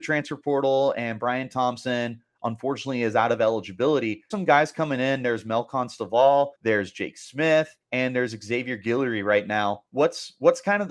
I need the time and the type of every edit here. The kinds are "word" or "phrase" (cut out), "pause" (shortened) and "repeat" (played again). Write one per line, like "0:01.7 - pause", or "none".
0:04.3 - word
0:06.5 - pause
0:07.8 - pause